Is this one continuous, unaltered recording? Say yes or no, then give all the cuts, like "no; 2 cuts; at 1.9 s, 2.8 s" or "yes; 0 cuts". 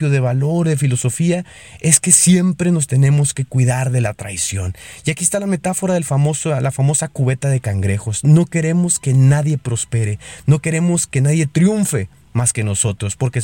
yes; 0 cuts